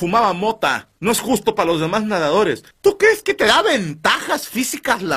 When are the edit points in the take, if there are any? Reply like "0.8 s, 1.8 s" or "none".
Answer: 1.0 s, 2.7 s